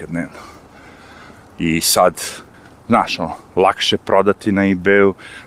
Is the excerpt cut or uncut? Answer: cut